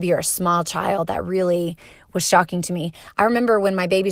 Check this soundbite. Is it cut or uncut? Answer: uncut